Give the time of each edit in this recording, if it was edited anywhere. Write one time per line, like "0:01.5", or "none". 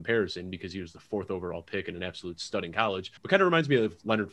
0:03.2